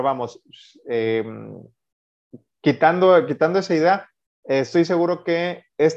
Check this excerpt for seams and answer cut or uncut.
uncut